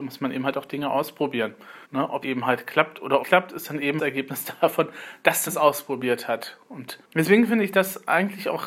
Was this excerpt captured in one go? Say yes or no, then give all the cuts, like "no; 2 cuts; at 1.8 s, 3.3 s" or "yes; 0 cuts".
no; 6 cuts; at 1.8 s, 2.2 s, 3.2 s, 4.0 s, 5.5 s, 7.0 s